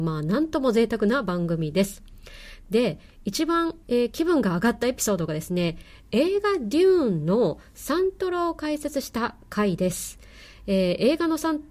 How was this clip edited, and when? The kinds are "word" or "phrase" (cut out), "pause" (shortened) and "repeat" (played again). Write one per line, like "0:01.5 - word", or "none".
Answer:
0:03.8 - pause